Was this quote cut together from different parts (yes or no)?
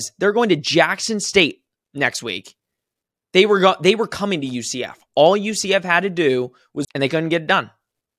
yes